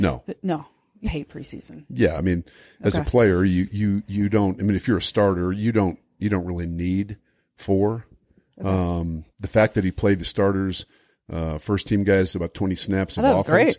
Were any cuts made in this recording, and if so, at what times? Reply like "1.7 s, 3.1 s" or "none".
1.0 s